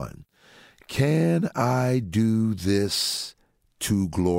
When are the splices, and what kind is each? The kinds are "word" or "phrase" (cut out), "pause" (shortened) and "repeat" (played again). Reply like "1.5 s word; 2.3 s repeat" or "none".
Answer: none